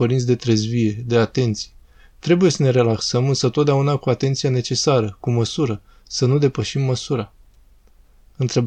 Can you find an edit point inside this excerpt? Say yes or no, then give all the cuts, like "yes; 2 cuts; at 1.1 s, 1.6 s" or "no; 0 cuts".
no; 0 cuts